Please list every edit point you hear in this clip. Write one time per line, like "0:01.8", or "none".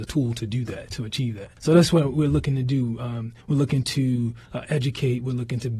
0:01.6
0:03.4
0:04.5